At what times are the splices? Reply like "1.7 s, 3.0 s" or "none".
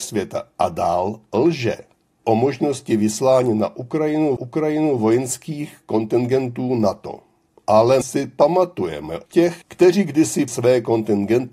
2.2 s, 4.4 s, 8.0 s, 9.3 s, 9.6 s, 10.5 s